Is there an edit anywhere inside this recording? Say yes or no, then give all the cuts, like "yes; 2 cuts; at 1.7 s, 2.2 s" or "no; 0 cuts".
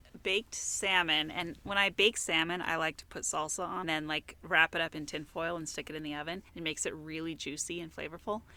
yes; 2 cuts; at 3.8 s, 6.5 s